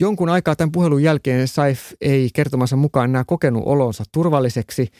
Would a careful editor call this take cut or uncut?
uncut